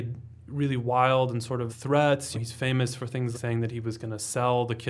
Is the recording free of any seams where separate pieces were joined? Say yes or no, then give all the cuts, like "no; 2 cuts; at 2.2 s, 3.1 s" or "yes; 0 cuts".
no; 3 cuts; at 1.7 s, 2.3 s, 3.3 s